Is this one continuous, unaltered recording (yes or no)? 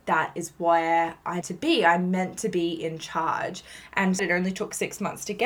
no